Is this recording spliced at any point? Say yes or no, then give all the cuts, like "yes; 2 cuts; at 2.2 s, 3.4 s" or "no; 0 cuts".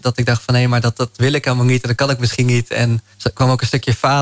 yes; 1 cut; at 3.1 s